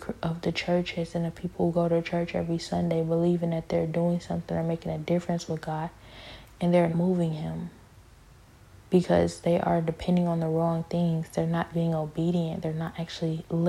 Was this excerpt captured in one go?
no; 2 cuts; at 6.9 s, 11.7 s

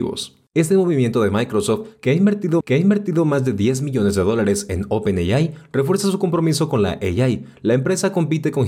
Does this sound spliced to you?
yes; 1 cut; at 2.6 s

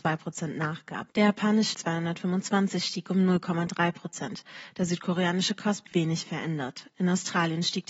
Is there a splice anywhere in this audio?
yes; 3 cuts; at 1.1 s, 1.7 s, 5.9 s

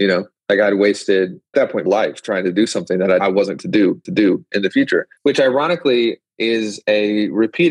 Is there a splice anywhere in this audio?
yes; 6 cuts; at 1.5 s, 1.9 s, 3.2 s, 3.6 s, 4.1 s, 5.2 s

